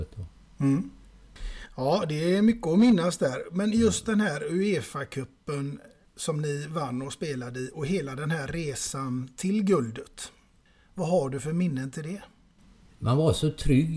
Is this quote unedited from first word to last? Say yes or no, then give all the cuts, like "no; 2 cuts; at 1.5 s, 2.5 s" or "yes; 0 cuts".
yes; 0 cuts